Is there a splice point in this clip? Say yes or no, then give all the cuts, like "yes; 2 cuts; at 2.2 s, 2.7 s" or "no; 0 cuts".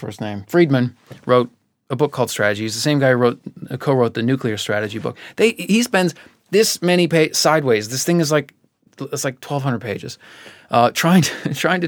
no; 0 cuts